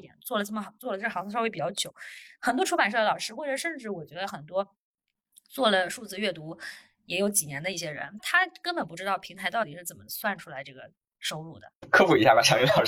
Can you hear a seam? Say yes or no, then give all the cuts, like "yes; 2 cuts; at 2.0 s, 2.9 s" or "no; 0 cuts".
no; 0 cuts